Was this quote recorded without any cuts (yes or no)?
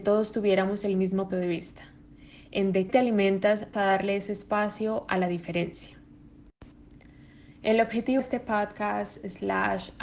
no